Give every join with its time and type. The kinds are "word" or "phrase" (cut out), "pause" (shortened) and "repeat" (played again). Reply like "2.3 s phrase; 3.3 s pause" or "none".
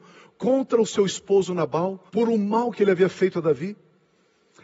2.1 s pause